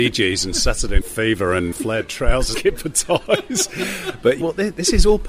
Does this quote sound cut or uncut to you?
cut